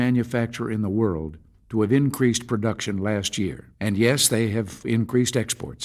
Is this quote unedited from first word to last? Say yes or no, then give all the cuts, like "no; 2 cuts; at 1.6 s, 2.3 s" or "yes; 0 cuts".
no; 3 cuts; at 1.5 s, 3.7 s, 4.8 s